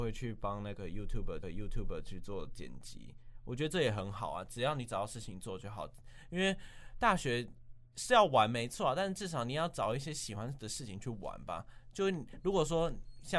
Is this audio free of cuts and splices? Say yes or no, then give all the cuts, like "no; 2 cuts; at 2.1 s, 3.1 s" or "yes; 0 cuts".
no; 1 cut; at 1.4 s